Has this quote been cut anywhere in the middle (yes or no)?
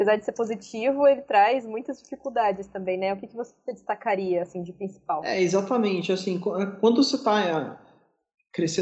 no